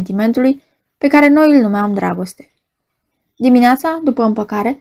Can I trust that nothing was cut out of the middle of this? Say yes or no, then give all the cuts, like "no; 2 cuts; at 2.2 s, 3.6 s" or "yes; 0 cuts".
yes; 0 cuts